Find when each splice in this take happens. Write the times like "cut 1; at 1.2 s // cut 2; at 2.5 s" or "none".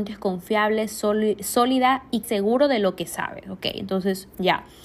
cut 1; at 2.2 s